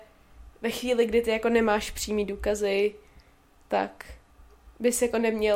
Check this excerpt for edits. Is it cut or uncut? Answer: uncut